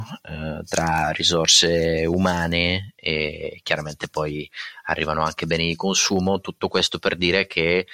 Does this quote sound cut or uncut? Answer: uncut